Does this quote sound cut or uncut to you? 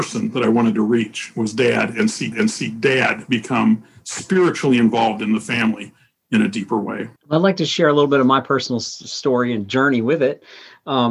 cut